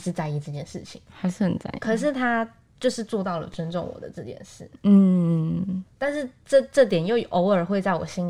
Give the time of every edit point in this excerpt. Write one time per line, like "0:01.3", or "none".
none